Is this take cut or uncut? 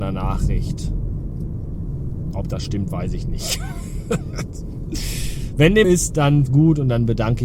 cut